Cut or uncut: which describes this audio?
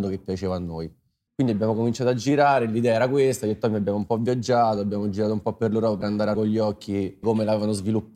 cut